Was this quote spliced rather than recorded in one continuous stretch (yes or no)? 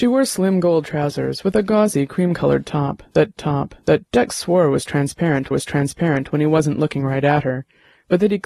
yes